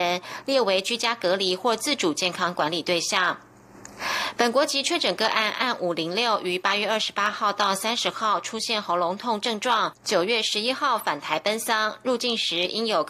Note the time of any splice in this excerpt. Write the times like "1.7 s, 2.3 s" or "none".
none